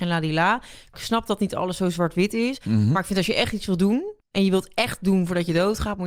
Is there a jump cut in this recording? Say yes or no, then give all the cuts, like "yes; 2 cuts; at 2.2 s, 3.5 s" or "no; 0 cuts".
yes; 1 cut; at 4.2 s